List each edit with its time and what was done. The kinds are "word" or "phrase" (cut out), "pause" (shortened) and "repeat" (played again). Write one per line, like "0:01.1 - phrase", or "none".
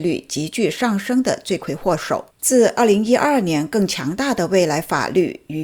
0:02.3 - pause